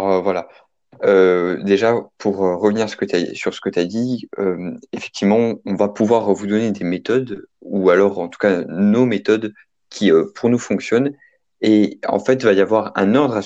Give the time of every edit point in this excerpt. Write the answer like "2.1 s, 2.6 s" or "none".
none